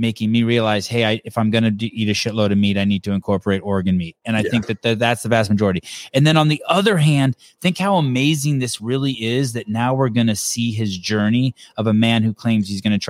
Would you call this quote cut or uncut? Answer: uncut